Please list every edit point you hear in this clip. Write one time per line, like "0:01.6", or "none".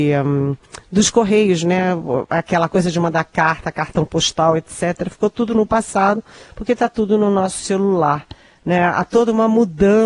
none